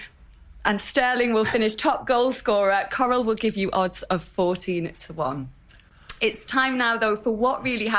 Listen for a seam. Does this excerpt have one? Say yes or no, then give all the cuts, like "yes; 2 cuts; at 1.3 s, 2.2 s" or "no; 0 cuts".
no; 0 cuts